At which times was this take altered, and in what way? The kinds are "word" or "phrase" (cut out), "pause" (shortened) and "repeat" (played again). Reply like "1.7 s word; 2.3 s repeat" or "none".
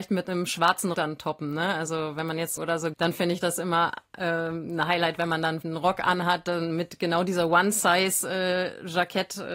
0.9 s word; 2.6 s word; 2.9 s word; 5.6 s word